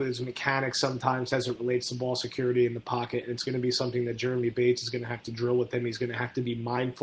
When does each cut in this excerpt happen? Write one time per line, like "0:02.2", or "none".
none